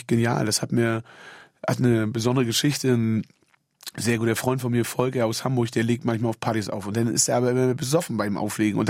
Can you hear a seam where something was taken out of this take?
no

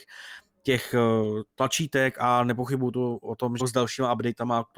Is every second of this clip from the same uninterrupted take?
no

